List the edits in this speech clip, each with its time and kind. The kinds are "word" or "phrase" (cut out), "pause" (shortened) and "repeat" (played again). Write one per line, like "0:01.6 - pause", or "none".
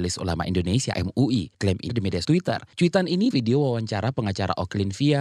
0:00.9 - word
0:01.9 - word
0:02.2 - word
0:03.3 - word